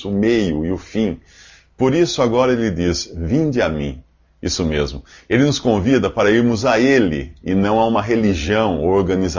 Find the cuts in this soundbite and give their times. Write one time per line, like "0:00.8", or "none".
none